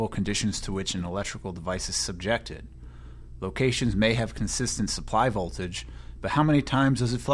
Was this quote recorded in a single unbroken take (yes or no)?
yes